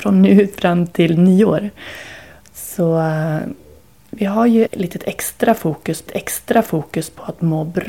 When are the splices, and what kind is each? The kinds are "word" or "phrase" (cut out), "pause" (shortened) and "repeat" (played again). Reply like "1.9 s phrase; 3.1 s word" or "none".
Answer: 4.7 s word; 6.1 s repeat